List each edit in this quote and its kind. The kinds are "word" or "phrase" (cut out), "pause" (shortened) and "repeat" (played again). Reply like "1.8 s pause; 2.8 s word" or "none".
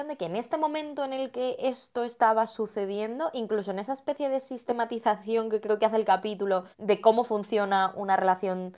6.7 s pause